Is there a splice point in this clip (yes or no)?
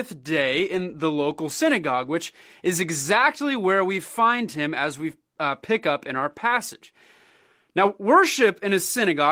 no